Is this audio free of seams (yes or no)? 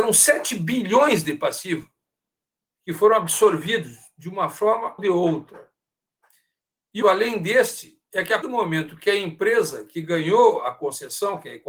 no